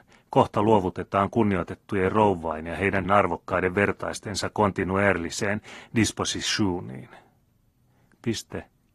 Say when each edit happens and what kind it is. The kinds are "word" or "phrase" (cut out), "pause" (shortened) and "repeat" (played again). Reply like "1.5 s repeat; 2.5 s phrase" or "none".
3.0 s word